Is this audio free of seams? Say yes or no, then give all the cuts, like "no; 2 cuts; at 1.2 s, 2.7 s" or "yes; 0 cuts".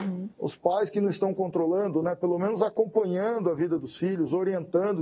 yes; 0 cuts